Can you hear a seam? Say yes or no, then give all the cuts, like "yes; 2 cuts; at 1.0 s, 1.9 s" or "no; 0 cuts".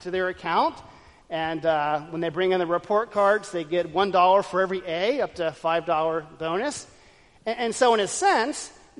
no; 0 cuts